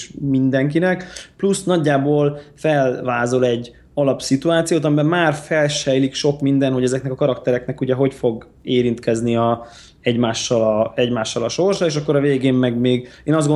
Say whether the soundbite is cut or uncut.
uncut